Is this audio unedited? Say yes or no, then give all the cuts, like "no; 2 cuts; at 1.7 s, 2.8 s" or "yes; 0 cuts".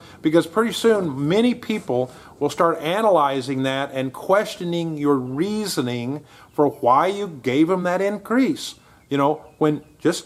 yes; 0 cuts